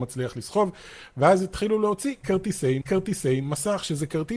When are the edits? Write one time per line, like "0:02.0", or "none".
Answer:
0:02.8